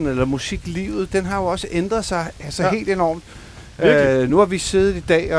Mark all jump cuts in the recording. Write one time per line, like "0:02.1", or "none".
none